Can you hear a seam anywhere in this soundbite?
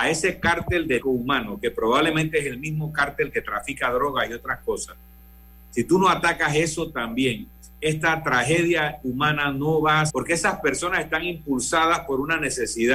yes; 2 cuts; at 1.0 s, 10.1 s

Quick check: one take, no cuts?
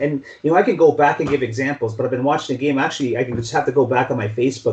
yes; 0 cuts

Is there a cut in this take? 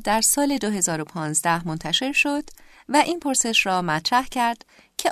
no; 0 cuts

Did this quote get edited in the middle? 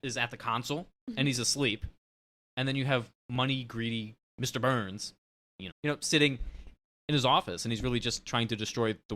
yes; 1 cut; at 5.7 s

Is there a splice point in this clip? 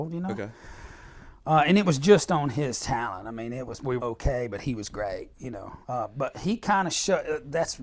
yes; 2 cuts; at 4.0 s, 5.8 s

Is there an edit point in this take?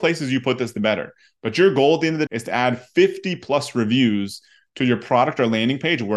yes; 1 cut; at 2.3 s

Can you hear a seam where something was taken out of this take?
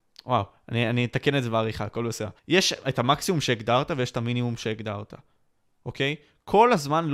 yes; 1 cut; at 2.4 s

